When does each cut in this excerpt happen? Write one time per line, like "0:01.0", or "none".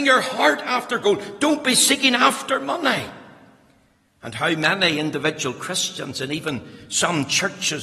none